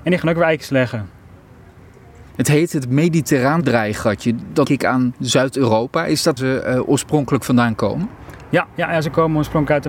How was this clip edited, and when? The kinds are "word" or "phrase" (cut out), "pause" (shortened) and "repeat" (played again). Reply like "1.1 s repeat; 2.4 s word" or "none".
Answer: 2.3 s pause; 4.6 s word; 6.4 s phrase